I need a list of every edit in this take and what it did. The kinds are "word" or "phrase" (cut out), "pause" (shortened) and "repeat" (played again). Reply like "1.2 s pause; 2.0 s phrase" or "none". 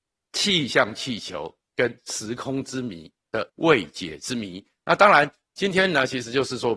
3.5 s pause